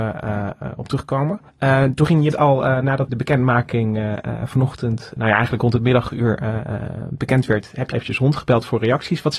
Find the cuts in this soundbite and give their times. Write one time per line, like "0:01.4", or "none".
0:01.5
0:02.3
0:03.1
0:05.2
0:07.9